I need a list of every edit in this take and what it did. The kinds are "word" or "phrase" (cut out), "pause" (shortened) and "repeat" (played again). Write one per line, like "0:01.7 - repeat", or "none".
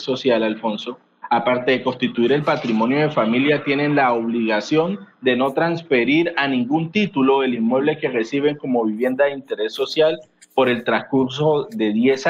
none